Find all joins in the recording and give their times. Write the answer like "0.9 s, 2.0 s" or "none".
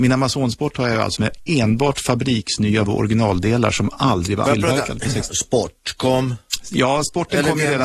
1.2 s, 2.9 s, 4.5 s, 5.3 s